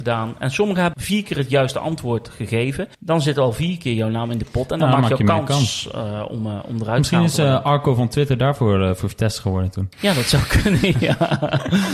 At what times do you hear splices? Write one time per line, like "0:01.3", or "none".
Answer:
0:00.9
0:02.9
0:09.9